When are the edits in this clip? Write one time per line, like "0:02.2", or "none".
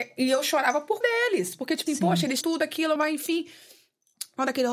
0:01.0
0:01.9
0:02.4
0:03.0